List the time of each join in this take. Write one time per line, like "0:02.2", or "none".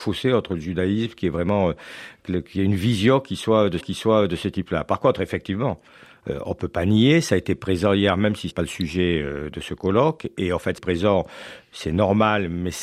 0:03.8
0:08.5
0:10.8